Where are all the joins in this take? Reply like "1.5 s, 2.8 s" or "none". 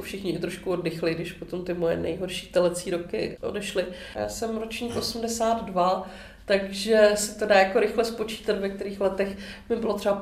none